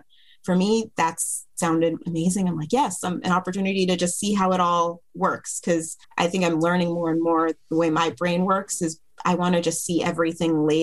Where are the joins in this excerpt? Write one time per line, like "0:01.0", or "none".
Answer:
0:06.0